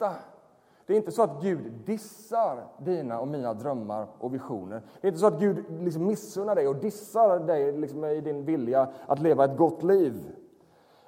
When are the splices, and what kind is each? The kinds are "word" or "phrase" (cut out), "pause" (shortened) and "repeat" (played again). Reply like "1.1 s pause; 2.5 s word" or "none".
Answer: none